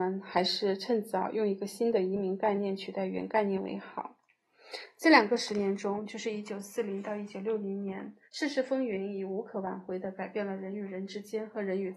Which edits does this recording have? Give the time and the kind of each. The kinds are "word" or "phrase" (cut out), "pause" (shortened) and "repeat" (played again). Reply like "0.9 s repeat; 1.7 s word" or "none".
8.2 s pause